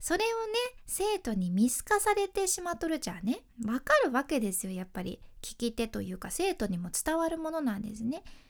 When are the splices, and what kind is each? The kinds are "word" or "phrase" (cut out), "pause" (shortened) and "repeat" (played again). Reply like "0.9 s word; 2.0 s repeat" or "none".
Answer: 3.5 s pause